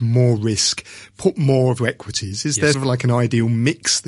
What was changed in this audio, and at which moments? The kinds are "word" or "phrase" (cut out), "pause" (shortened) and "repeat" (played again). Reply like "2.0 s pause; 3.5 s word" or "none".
1.8 s phrase; 2.7 s word

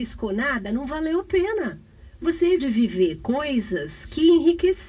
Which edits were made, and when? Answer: 2.2 s word; 2.6 s word

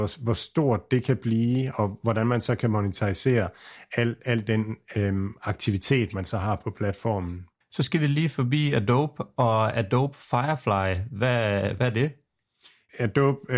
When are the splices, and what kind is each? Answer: 7.6 s pause

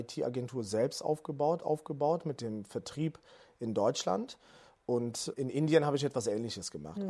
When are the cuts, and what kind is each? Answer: 1.6 s repeat; 5.3 s word

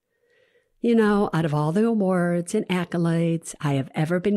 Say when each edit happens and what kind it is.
none

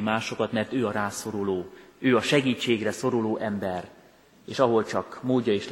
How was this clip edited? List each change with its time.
none

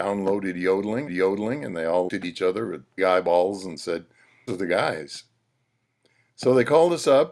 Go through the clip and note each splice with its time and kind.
1.1 s repeat; 2.1 s word; 3.0 s phrase; 4.5 s word

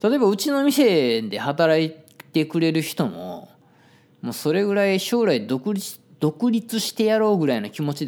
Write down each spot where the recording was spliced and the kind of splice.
none

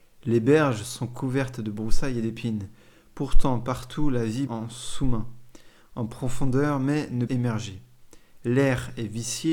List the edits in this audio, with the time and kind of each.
4.5 s word; 7.3 s word

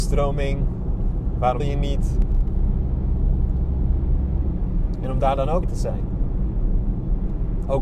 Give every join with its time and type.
1.6 s word; 5.6 s word

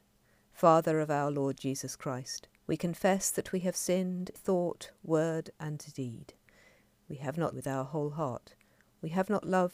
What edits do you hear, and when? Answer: 2.6 s pause; 4.3 s word; 7.5 s phrase

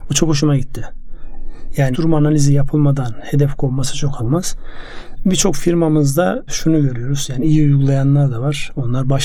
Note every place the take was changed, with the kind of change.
1.9 s word; 4.2 s word; 6.5 s word

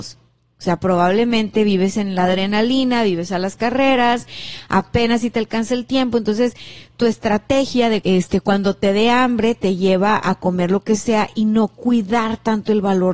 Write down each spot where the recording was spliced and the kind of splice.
8.0 s word

